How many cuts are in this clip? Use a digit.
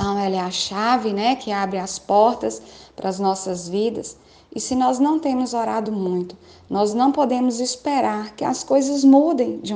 0